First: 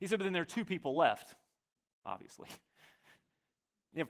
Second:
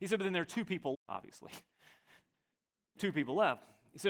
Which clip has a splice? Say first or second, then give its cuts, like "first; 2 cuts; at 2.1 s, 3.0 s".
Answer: second; 2 cuts; at 0.9 s, 3.0 s